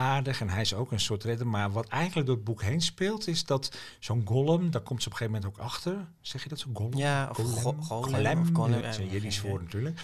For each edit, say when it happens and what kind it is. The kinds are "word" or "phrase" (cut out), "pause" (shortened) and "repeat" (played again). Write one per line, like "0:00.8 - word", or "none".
0:08.8 - word